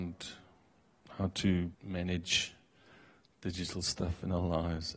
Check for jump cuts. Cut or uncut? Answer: cut